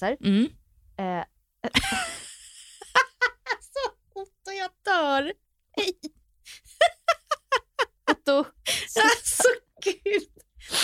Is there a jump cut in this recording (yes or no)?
no